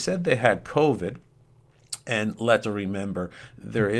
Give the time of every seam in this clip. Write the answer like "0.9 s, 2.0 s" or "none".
2.6 s